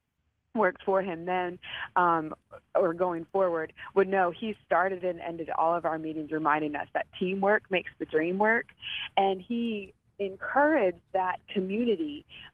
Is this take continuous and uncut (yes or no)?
yes